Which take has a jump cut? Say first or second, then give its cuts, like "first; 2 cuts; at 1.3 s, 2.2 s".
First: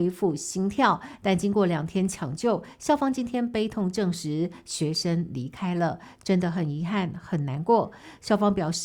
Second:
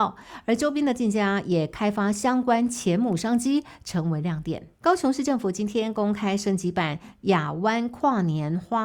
second; 1 cut; at 4.7 s